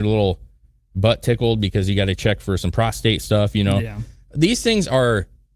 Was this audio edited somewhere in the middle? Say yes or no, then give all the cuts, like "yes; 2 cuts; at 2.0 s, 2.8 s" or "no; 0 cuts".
no; 0 cuts